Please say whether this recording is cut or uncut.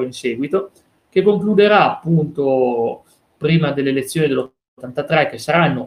uncut